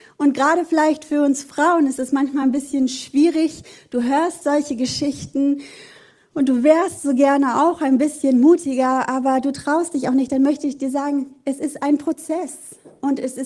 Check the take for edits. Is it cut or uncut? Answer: uncut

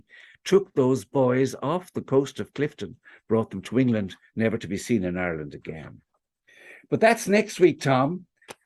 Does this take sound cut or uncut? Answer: uncut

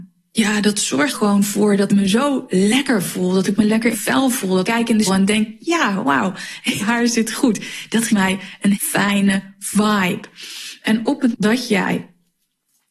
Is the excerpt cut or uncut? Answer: cut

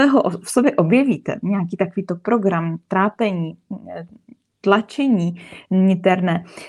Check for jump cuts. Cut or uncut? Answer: uncut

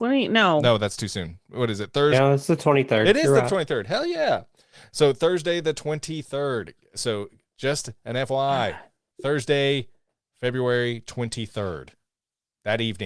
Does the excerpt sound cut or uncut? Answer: uncut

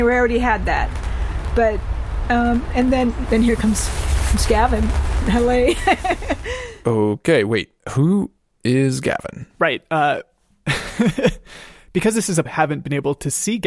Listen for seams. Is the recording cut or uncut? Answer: cut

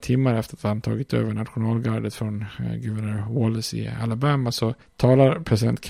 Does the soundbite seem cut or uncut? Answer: uncut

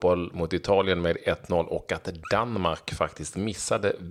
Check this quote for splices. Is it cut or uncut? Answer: uncut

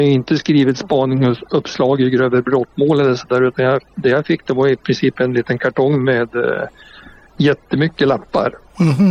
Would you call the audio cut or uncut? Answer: cut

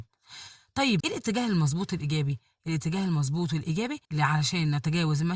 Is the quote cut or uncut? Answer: cut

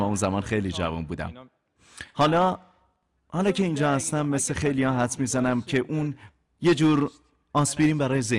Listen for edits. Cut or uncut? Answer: cut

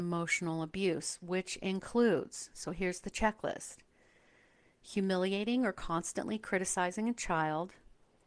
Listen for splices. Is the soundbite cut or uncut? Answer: uncut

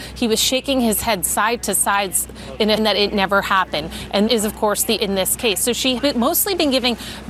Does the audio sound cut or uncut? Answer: cut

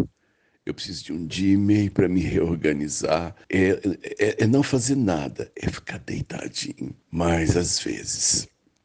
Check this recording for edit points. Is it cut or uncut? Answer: cut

